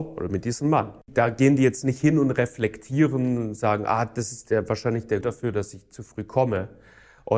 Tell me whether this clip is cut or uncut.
cut